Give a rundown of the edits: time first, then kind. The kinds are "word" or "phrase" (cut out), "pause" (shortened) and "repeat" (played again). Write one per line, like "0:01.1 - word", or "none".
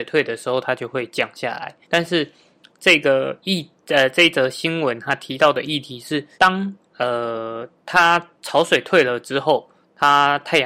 0:01.8 - pause
0:06.3 - pause